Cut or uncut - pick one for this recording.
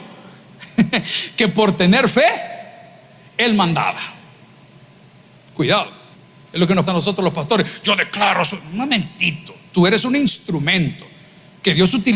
cut